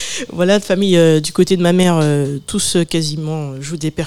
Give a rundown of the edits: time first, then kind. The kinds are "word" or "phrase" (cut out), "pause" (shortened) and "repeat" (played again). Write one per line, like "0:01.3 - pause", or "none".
none